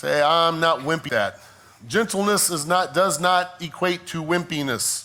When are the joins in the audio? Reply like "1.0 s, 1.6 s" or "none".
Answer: 1.1 s